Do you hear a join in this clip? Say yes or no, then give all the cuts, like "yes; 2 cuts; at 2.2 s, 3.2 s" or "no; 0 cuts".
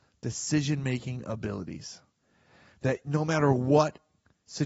no; 0 cuts